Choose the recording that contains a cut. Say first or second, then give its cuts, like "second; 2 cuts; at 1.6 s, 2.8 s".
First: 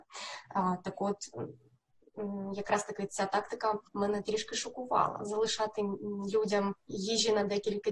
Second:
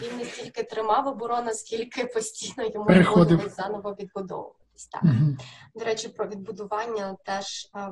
first; 1 cut; at 3.9 s